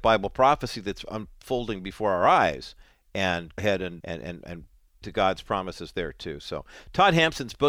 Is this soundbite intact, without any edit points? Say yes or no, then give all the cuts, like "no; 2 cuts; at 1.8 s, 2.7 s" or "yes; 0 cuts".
no; 3 cuts; at 3.6 s, 4.0 s, 5.0 s